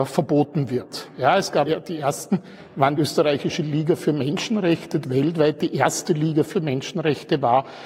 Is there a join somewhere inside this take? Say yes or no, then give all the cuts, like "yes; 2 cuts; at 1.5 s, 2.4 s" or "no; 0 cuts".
yes; 3 cuts; at 1.7 s, 3.0 s, 5.0 s